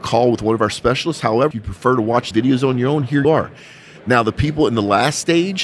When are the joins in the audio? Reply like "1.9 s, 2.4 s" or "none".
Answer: 1.5 s, 2.3 s, 3.2 s